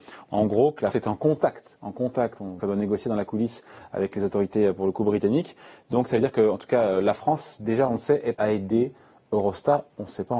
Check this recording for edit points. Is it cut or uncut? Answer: cut